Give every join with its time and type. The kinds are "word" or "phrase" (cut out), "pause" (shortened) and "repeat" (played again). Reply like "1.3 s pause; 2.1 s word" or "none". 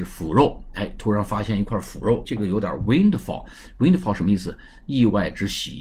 2.2 s word

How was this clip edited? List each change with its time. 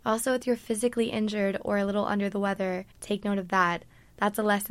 2.9 s pause

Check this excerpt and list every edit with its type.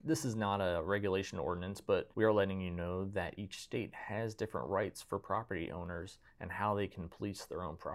2.1 s pause

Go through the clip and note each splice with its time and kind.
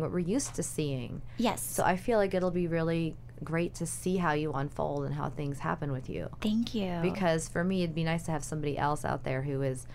none

